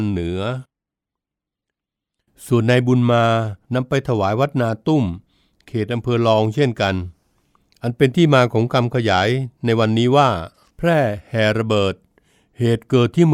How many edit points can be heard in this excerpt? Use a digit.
1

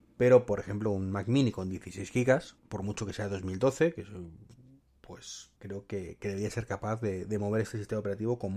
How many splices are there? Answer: 2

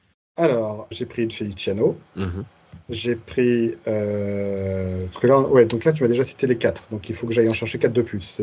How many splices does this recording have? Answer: 3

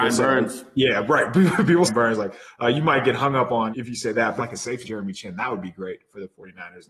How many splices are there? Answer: 4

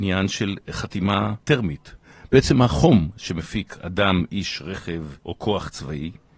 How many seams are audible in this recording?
2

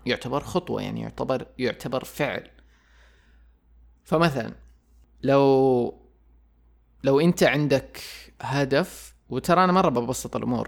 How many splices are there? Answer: 0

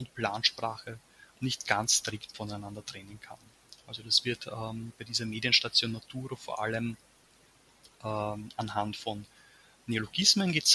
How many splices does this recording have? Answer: 0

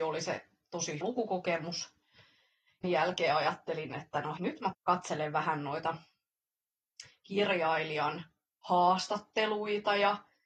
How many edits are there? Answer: 4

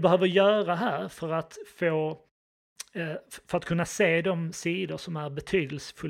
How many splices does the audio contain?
0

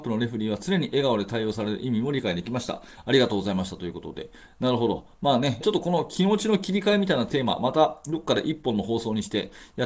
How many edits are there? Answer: 1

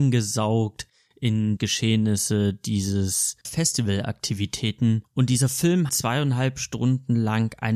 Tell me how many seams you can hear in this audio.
3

